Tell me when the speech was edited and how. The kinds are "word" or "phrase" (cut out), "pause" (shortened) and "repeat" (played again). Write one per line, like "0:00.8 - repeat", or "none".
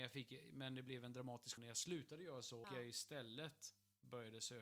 0:01.6 - word
0:02.6 - word